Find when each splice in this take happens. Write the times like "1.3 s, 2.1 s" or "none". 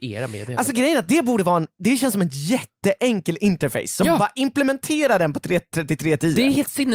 none